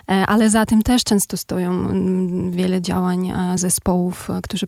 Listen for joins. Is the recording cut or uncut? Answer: uncut